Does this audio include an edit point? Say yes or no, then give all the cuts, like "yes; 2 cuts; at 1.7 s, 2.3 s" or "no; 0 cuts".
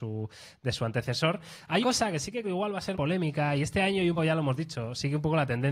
yes; 4 cuts; at 1.8 s, 2.4 s, 2.9 s, 4.2 s